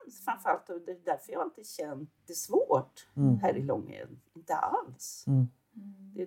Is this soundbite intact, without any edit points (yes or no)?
no